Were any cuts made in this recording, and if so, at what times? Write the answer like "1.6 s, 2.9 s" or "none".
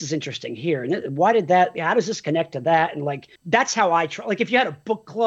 3.4 s

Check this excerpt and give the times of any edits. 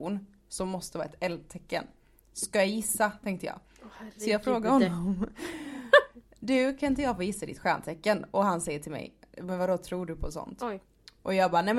none

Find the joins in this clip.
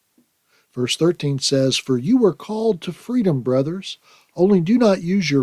none

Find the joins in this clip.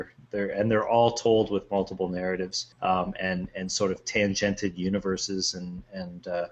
2.7 s

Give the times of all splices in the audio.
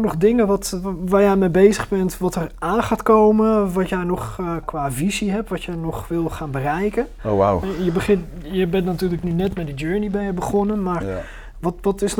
4.6 s

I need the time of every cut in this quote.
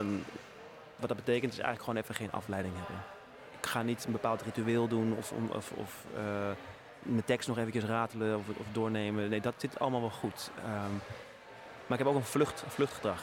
none

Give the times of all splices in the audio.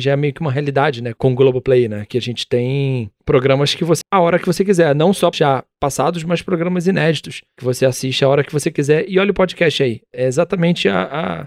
4.0 s, 5.3 s

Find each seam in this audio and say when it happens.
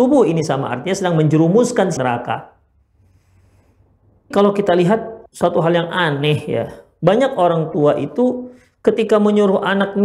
2.0 s, 4.3 s, 5.3 s

